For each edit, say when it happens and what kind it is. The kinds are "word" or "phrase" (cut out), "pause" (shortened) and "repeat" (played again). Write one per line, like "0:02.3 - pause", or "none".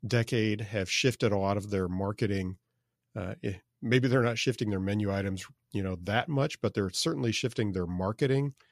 none

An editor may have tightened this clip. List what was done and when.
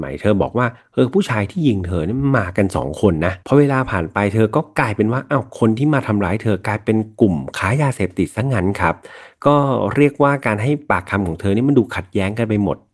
0:03.4 - pause

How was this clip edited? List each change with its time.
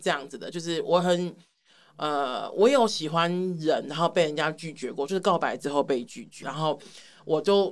0:06.4 - word

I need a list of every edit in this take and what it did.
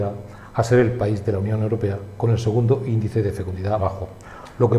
0:03.8 - word

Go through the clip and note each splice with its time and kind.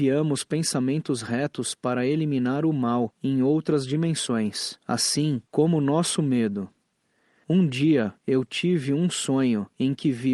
none

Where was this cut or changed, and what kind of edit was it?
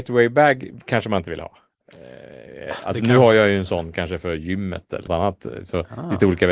0:05.1 - word

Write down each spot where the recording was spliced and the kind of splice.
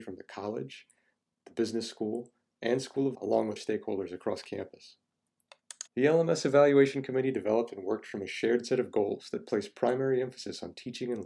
0:03.1 - word
0:03.6 - word
0:05.9 - pause

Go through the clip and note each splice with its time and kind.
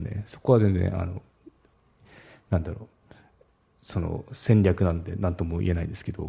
none

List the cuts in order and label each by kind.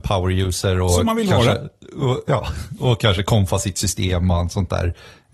none

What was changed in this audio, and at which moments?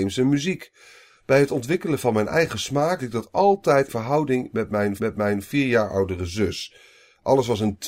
0:03.0 - word
0:03.9 - word
0:05.0 - repeat

